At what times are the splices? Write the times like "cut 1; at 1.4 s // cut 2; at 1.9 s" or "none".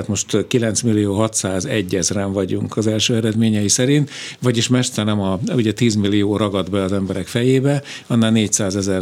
cut 1; at 2.7 s

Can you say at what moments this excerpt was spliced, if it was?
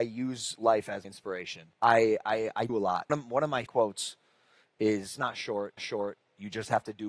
cut 1; at 1.0 s // cut 2; at 1.7 s // cut 3; at 2.7 s // cut 4; at 3.1 s // cut 5; at 3.7 s // cut 6; at 5.2 s // cut 7; at 5.8 s

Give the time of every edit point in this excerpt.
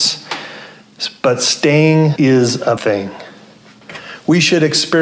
cut 1; at 2.2 s // cut 2; at 2.8 s

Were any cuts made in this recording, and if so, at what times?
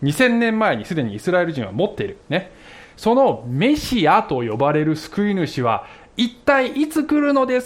cut 1; at 2.2 s

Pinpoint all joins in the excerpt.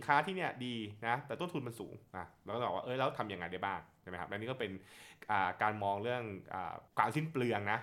cut 1; at 2.1 s // cut 2; at 6.9 s

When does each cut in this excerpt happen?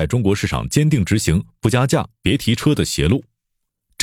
none

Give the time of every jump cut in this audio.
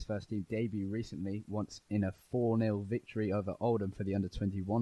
none

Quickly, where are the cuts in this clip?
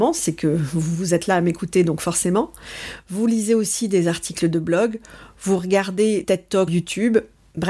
cut 1; at 6.2 s // cut 2; at 6.7 s

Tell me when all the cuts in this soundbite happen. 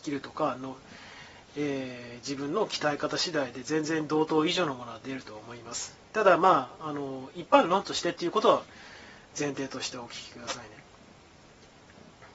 none

